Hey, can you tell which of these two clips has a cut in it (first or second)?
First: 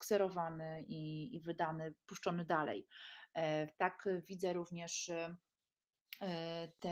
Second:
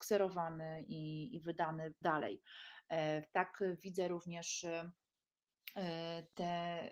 second